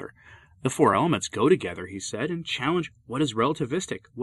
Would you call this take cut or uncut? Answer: uncut